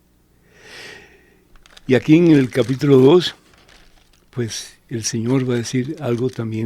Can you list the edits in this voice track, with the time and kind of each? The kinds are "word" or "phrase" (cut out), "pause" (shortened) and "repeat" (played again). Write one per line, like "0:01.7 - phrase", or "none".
none